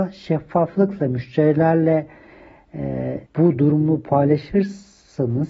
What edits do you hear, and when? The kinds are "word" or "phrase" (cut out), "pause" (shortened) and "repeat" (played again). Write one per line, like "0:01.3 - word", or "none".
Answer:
0:03.3 - pause